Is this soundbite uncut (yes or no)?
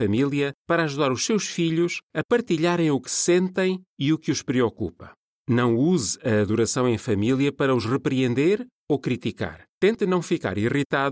no